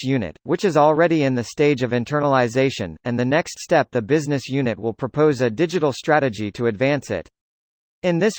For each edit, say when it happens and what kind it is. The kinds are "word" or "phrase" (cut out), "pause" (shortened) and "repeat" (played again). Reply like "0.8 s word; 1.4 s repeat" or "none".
none